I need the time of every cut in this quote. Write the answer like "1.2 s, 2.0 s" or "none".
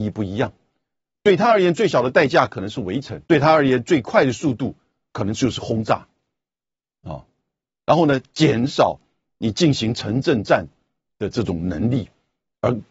3.2 s